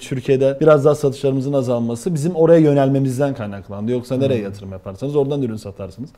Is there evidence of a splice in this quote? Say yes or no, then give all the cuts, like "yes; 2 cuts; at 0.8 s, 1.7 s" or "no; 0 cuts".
no; 0 cuts